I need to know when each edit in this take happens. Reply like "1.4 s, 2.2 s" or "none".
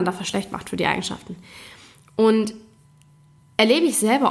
none